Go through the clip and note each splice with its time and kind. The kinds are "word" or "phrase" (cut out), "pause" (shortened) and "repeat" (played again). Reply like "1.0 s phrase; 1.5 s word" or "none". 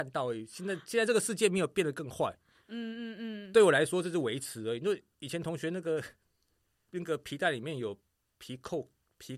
none